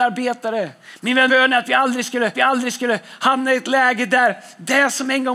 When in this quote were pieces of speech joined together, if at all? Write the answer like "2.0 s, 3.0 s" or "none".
1.3 s, 2.3 s